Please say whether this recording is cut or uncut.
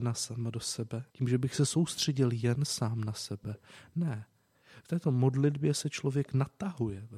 cut